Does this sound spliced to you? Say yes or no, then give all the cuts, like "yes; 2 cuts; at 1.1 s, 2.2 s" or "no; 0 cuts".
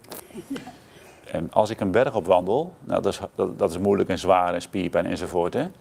no; 0 cuts